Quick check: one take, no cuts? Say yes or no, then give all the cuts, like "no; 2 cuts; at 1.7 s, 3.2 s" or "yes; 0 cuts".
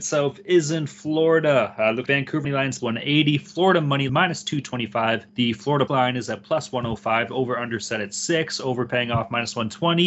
no; 6 cuts; at 2.1 s, 2.4 s, 2.8 s, 4.1 s, 5.3 s, 5.9 s